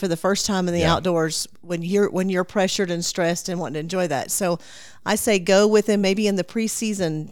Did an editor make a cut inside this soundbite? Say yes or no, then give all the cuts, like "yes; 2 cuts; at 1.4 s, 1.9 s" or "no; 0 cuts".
no; 0 cuts